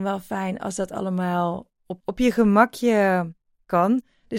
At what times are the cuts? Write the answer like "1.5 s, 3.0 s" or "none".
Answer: 2.0 s